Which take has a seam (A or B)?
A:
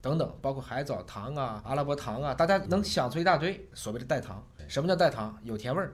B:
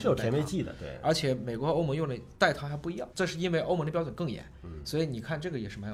B